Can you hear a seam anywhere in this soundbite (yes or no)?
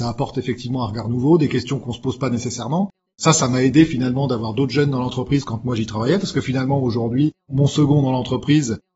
yes